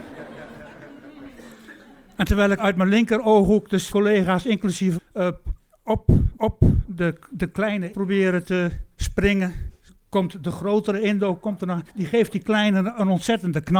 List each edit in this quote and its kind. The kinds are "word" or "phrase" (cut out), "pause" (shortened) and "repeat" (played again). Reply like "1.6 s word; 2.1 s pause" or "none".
2.6 s word; 3.9 s word; 5.0 s word; 6.3 s repeat; 7.9 s word; 8.9 s pause; 11.9 s pause